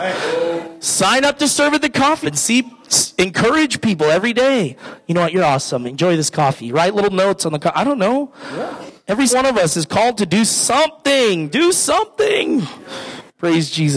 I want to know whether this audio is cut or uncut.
cut